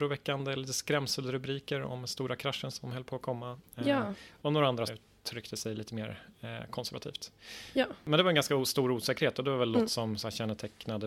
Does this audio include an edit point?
yes; 1 cut; at 4.9 s

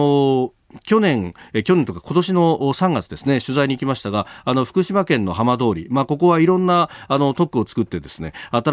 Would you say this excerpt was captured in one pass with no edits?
yes; 0 cuts

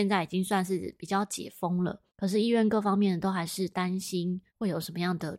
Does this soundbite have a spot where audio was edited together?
yes; 2 cuts; at 2.1 s, 4.5 s

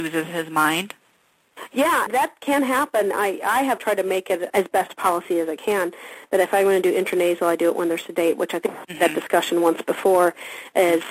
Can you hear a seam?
yes; 3 cuts; at 2.1 s, 3.8 s, 4.5 s

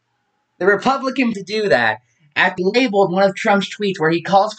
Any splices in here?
yes; 2 cuts; at 1.3 s, 2.6 s

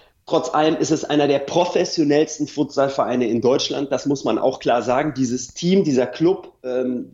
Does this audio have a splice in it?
no; 0 cuts

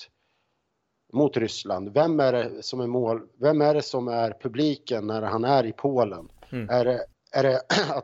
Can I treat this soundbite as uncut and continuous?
yes; 0 cuts

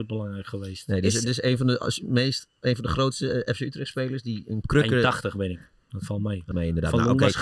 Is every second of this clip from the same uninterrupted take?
no; 3 cuts; at 2.6 s, 4.6 s, 6.5 s

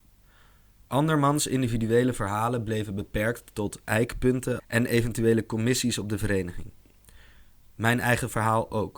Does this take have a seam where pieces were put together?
yes; 1 cut; at 4.6 s

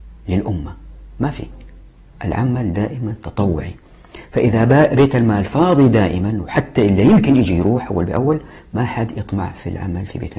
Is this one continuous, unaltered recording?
yes; 0 cuts

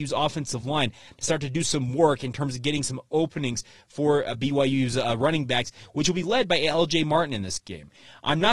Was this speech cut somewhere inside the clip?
no; 0 cuts

